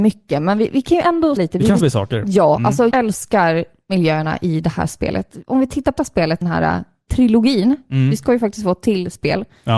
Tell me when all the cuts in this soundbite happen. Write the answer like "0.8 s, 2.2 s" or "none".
1.4 s, 1.8 s, 2.9 s, 6.0 s, 6.4 s, 7.1 s